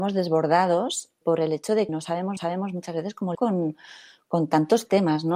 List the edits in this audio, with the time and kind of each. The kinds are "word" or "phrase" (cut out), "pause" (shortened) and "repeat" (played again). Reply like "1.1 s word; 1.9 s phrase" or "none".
1.2 s word; 1.9 s word; 2.4 s repeat; 3.3 s word

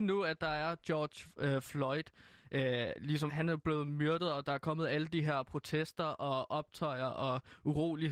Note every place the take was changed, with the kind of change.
3.3 s word

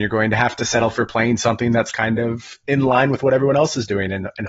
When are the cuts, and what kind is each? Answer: none

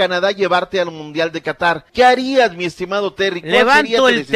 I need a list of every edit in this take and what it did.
1.9 s pause

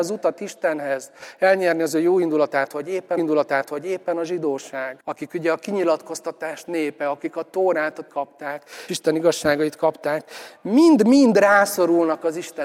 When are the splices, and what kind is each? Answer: 3.2 s repeat; 5.0 s pause; 8.1 s word; 8.9 s word

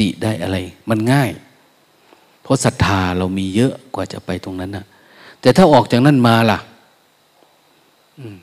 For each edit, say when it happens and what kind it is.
none

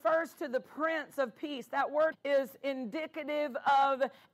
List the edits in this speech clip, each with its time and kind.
2.1 s word

